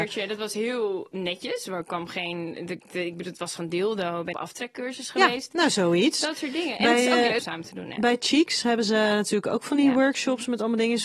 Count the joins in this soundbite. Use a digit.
3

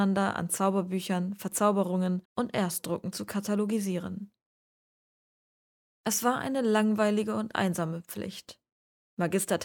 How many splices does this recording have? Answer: 1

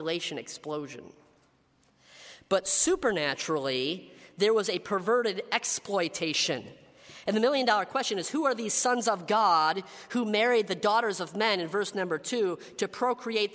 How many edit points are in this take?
0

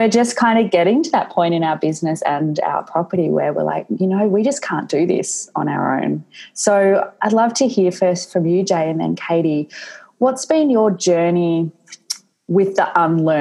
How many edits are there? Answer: 0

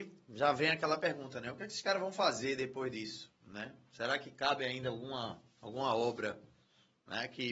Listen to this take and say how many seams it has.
0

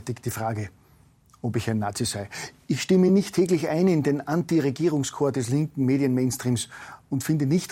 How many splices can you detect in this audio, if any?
0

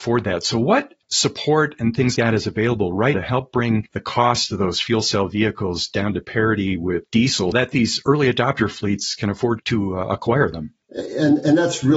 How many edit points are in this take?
4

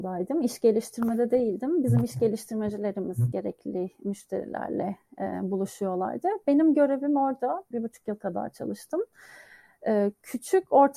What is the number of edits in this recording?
1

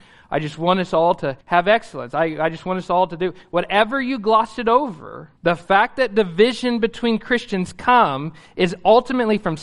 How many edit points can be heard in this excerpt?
2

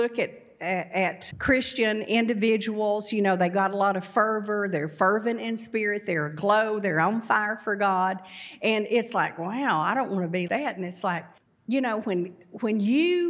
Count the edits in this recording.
3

